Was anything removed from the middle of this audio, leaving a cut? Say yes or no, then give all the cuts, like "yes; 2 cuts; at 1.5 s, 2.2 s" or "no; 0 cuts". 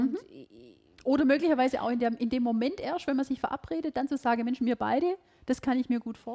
no; 0 cuts